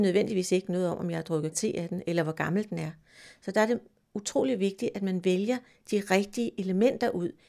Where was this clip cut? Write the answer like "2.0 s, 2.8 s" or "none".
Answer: 1.5 s

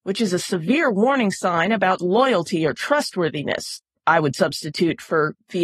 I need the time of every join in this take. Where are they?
2.0 s, 4.0 s

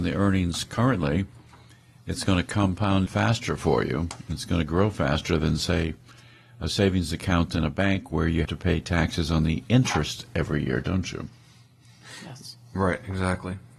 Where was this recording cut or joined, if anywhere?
3.1 s, 8.4 s

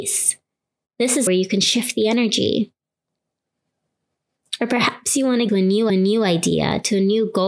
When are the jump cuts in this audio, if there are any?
1.3 s, 5.5 s, 5.9 s

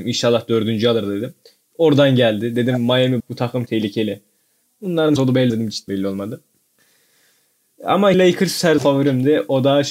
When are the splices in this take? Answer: 3.2 s, 3.7 s, 5.2 s, 5.5 s, 5.9 s, 8.1 s, 8.8 s

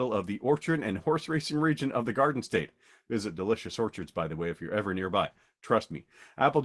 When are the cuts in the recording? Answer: none

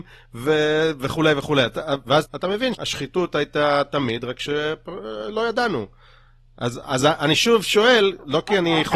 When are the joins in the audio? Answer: 2.3 s, 2.7 s, 6.8 s

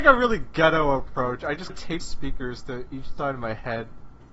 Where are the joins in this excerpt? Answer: 1.7 s, 2.0 s

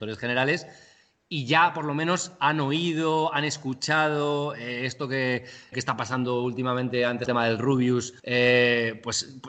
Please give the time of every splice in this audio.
5.7 s, 7.3 s, 8.2 s

